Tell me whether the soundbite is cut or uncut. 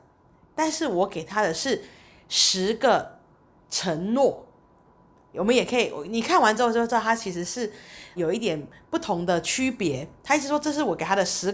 cut